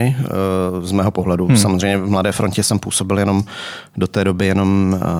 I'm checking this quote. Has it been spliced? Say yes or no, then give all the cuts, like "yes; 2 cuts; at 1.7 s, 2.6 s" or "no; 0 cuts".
no; 0 cuts